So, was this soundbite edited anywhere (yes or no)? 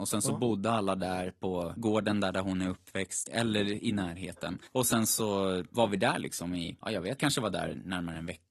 yes